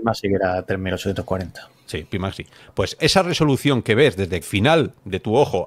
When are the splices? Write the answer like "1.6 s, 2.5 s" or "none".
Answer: 3.0 s, 4.4 s